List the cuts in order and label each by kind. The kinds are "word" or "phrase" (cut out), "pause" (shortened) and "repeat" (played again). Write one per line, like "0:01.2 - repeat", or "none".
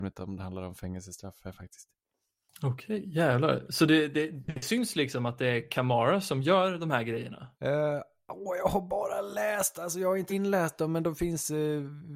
0:07.5 - pause
0:10.3 - word